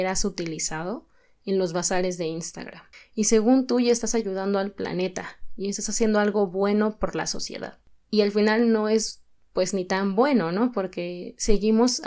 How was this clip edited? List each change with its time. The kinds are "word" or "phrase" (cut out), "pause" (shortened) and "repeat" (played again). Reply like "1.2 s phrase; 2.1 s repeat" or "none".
none